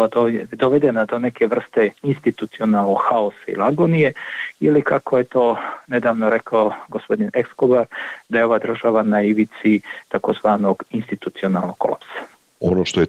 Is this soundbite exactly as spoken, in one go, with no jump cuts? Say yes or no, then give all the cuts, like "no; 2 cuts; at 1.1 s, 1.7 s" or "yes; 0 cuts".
no; 1 cut; at 2.0 s